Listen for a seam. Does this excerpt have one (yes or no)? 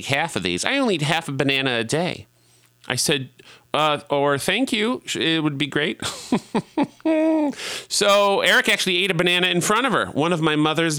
no